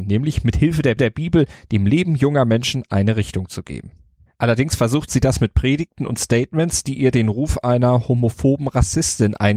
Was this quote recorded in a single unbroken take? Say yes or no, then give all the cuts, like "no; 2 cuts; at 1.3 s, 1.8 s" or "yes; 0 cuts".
no; 1 cut; at 1.0 s